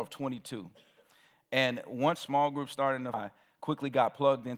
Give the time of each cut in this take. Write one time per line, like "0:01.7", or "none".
0:02.2
0:03.1